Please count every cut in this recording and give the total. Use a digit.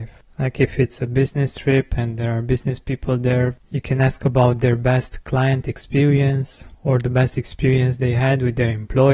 1